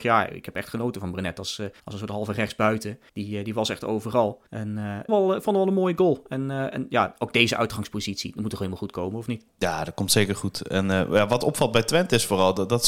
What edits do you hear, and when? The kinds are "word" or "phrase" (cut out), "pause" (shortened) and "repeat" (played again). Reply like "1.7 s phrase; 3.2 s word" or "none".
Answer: 1.8 s pause; 3.1 s pause; 4.5 s pause; 5.1 s phrase